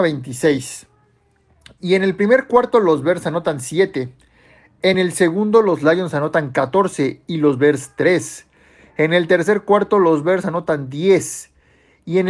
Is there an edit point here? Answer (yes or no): no